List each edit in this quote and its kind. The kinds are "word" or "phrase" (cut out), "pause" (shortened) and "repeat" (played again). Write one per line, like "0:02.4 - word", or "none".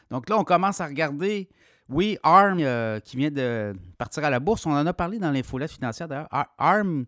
0:02.6 - phrase